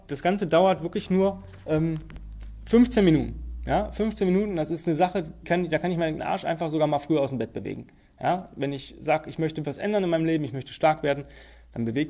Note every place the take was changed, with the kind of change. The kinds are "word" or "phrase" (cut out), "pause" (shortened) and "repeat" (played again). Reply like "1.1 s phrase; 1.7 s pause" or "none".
5.4 s word; 6.2 s word; 9.6 s word